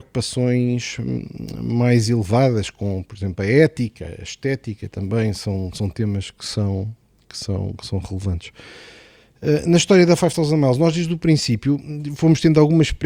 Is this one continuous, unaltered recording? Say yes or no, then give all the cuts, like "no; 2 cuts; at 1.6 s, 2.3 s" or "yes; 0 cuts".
yes; 0 cuts